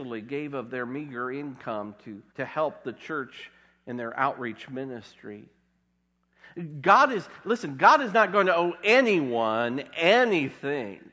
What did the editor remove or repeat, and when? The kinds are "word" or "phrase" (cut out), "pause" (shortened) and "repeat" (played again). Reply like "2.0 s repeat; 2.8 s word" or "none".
2.3 s pause